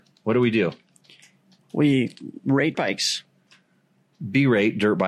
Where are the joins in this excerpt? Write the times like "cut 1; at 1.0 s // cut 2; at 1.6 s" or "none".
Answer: cut 1; at 2.7 s